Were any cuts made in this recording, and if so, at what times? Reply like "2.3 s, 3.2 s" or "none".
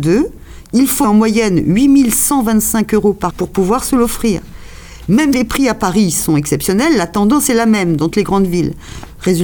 1.0 s, 3.3 s, 5.3 s, 8.1 s